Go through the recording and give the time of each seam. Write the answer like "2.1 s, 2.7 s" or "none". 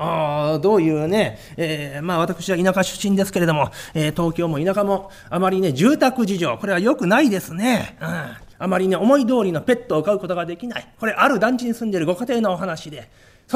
8.5 s

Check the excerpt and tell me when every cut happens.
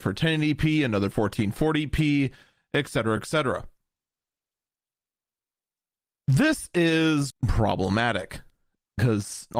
1.1 s, 3.2 s, 7.3 s

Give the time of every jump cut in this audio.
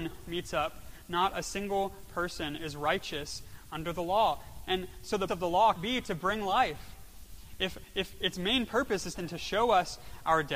5.3 s, 5.7 s, 9.1 s

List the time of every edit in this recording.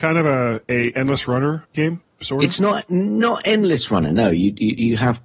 1.7 s

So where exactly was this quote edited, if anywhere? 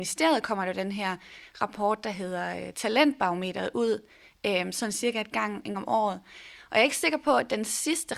5.7 s

